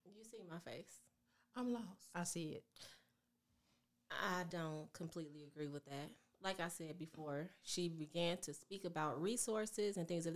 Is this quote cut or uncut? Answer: uncut